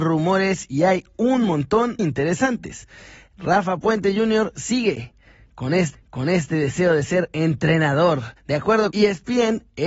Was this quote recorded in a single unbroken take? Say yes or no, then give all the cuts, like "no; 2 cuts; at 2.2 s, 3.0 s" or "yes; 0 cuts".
no; 4 cuts; at 2.0 s, 5.9 s, 8.4 s, 8.9 s